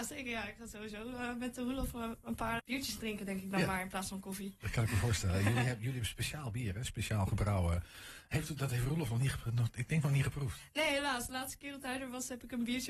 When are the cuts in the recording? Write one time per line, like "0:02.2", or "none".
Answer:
0:02.6